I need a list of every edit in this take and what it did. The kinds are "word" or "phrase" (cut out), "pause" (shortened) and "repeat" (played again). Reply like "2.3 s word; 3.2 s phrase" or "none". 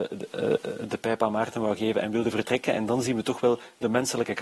none